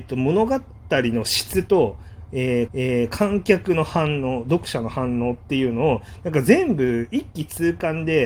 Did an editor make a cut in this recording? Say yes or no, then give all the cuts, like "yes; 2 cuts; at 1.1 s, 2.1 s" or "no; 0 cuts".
yes; 1 cut; at 2.7 s